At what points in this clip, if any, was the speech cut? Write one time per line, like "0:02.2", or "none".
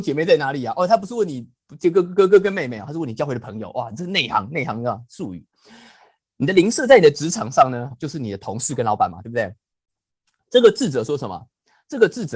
0:07.9